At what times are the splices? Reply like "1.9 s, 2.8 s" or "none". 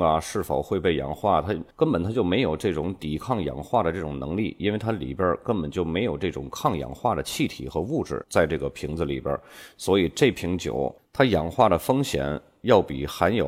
1.7 s